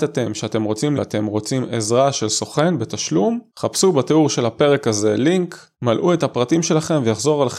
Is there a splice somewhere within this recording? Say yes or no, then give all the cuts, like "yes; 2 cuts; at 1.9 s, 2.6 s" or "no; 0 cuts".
yes; 3 cuts; at 0.9 s, 3.5 s, 5.7 s